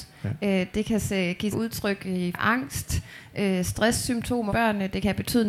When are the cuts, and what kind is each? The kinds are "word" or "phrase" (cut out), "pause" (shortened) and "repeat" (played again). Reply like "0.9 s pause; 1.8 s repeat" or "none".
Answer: 1.5 s word; 2.3 s word; 4.5 s word